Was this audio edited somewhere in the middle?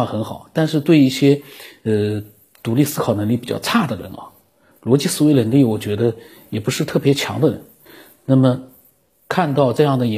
no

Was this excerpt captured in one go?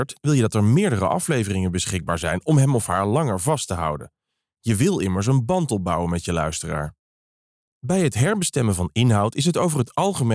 yes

